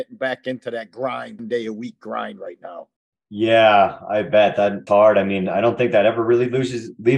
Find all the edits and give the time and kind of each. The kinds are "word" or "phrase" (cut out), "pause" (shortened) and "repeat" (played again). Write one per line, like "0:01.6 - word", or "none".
0:01.4 - phrase
0:03.0 - pause
0:04.9 - word